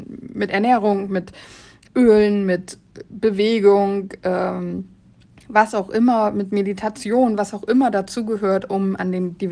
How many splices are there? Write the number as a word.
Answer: zero